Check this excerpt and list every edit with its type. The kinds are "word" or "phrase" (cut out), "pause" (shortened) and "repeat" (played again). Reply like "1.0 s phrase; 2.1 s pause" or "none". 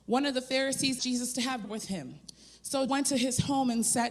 1.0 s word; 1.6 s word; 2.9 s word